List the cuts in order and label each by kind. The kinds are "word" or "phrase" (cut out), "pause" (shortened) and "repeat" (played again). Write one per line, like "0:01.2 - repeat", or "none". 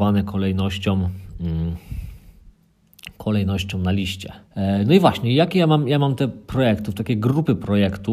0:04.4 - pause